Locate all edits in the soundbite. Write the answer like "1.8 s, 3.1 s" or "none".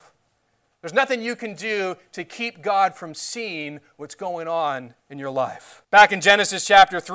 5.0 s, 5.8 s